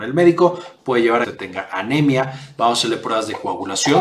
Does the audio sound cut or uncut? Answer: cut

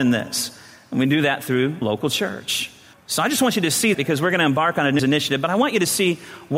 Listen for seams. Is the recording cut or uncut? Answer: cut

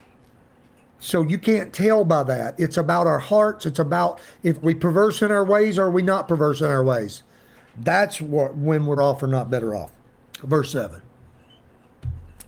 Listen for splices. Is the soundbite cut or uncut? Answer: cut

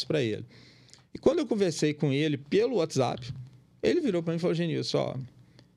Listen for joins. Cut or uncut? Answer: uncut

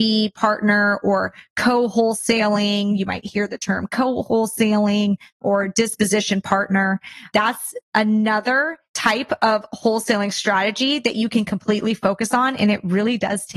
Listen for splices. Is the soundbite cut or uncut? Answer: cut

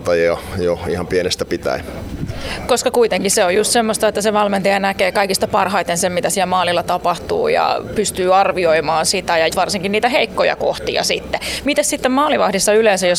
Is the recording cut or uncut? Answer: cut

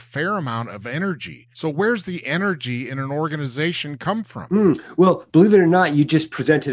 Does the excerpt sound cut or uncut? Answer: cut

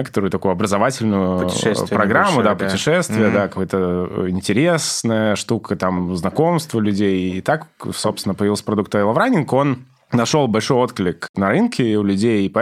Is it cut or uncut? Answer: uncut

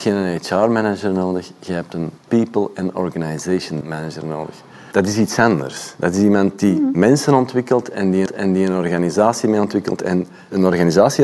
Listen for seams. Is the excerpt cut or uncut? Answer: cut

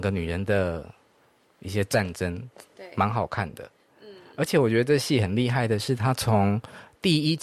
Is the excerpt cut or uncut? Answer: uncut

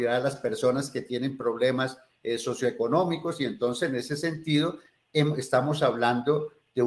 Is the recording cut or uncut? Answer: uncut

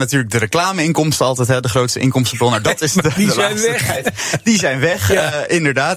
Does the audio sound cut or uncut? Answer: uncut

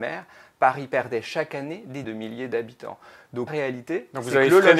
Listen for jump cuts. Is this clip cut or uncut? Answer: cut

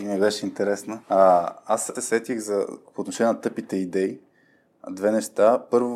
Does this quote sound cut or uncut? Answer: cut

